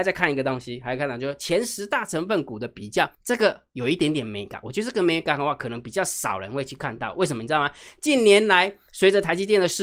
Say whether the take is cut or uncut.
cut